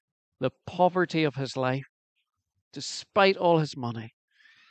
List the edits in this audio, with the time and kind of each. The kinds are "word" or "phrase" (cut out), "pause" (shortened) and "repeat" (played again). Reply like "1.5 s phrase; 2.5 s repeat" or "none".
none